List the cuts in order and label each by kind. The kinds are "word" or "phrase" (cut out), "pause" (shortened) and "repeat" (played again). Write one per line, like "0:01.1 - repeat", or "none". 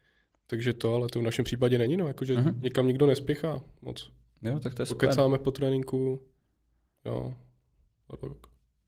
none